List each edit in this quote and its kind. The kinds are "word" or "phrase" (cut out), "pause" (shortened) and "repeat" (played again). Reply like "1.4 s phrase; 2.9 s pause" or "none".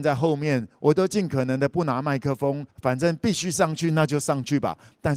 2.7 s pause